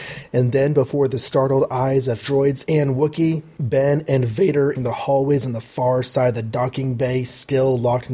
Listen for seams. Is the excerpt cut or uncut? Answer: cut